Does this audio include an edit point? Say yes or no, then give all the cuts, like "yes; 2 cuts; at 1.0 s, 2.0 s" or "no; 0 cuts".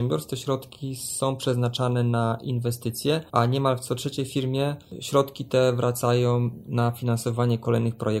yes; 1 cut; at 3.3 s